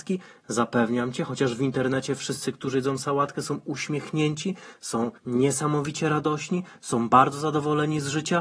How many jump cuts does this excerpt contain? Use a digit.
1